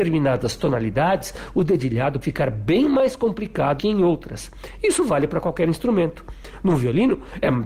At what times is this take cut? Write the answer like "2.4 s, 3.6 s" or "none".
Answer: 2.2 s, 3.8 s